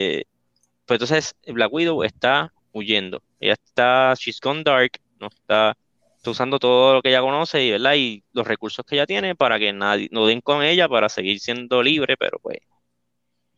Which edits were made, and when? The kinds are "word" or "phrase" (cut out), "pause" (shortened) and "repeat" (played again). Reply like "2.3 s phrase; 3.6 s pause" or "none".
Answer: none